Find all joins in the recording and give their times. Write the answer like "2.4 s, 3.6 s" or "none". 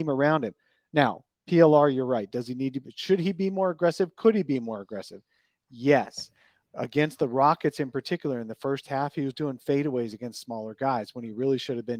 none